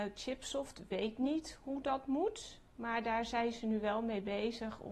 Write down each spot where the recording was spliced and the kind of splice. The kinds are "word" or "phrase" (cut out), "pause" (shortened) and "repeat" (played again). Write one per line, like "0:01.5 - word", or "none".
none